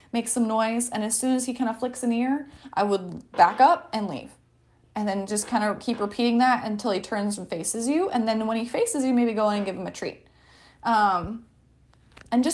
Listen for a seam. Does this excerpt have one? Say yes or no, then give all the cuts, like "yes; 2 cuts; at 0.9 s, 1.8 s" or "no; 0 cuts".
no; 0 cuts